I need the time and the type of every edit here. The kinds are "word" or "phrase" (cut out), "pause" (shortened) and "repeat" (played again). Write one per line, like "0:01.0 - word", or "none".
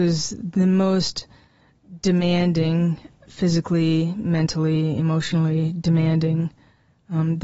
0:03.2 - word